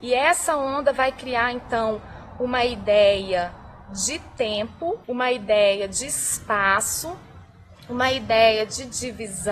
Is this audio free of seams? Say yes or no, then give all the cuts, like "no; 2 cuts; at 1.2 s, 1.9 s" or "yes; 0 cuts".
no; 1 cut; at 5.0 s